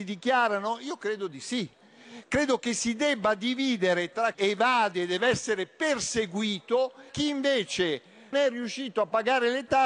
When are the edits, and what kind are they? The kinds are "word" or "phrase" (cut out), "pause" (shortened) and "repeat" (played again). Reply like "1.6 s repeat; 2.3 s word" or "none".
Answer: 4.3 s word; 7.1 s word; 8.3 s word

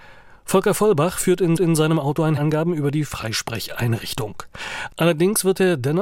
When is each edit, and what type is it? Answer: 1.6 s repeat; 2.4 s phrase

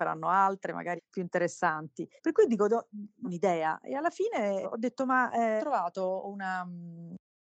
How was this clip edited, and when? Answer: 1.0 s word; 2.2 s pause; 3.2 s word; 4.6 s word; 5.6 s word

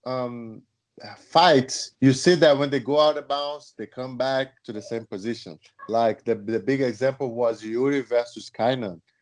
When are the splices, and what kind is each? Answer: 1.9 s pause

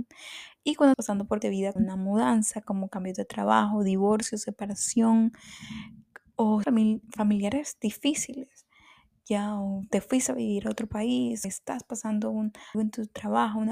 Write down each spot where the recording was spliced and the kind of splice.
0.9 s word; 1.4 s word; 1.8 s word; 6.6 s word; 11.4 s word; 12.7 s word

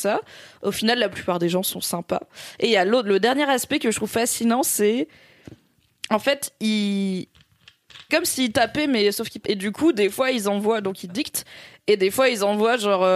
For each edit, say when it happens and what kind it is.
8.1 s word; 9.4 s word

